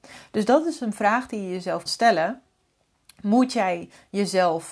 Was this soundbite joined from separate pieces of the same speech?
yes; 1 cut; at 1.9 s

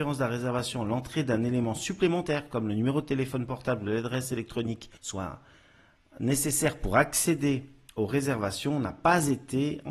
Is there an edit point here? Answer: yes; 2 cuts; at 5.0 s, 7.9 s

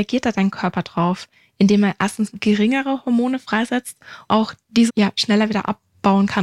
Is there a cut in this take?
yes; 3 cuts; at 2.3 s, 4.3 s, 4.9 s

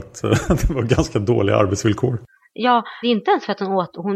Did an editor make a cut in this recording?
yes; 1 cut; at 3.0 s

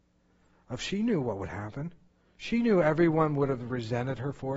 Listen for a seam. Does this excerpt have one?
yes; 1 cut; at 2.1 s

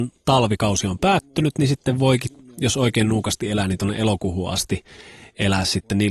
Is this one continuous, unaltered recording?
yes; 0 cuts

